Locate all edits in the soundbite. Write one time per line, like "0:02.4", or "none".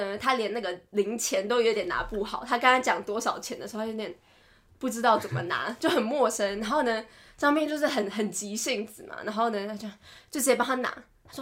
none